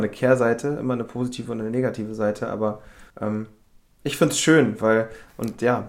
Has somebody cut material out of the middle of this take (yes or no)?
yes